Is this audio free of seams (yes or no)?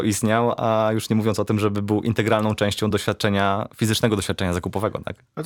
yes